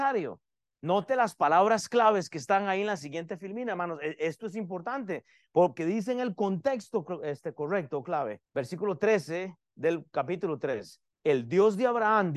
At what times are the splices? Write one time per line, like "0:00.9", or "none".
0:05.8
0:08.4
0:11.1